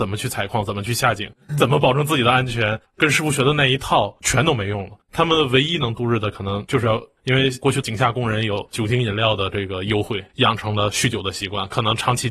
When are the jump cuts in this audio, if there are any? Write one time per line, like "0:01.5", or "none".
0:05.0
0:10.3